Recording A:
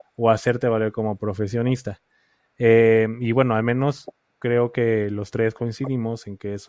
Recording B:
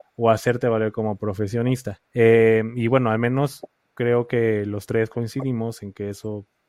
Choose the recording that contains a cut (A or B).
B